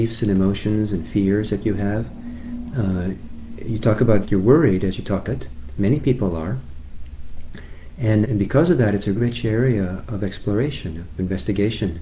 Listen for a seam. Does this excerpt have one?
yes; 4 cuts; at 4.2 s, 5.3 s, 8.2 s, 9.2 s

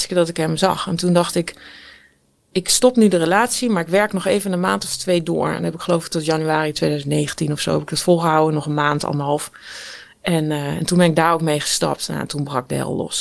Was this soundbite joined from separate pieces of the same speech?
no; 0 cuts

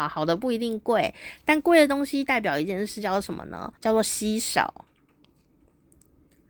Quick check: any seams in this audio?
yes; 1 cut; at 3.8 s

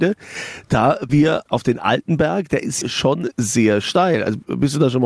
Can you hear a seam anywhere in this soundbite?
yes; 4 cuts; at 1.1 s, 1.5 s, 2.8 s, 3.3 s

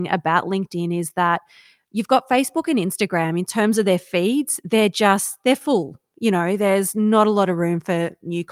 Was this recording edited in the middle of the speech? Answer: no; 0 cuts

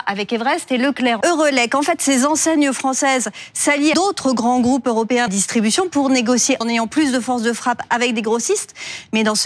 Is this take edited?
yes; 4 cuts; at 1.2 s, 3.9 s, 5.3 s, 6.6 s

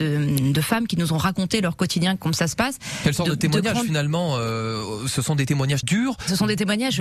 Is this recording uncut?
no; 1 cut; at 5.8 s

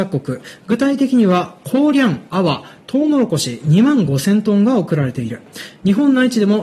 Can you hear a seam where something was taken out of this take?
no; 0 cuts

